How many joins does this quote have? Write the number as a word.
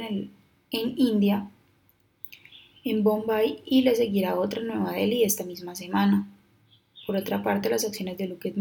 zero